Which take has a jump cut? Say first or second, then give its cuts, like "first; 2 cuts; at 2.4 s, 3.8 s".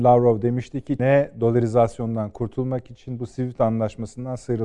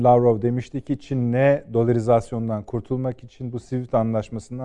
first; 1 cut; at 1.0 s